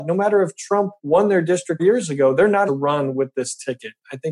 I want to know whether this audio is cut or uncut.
cut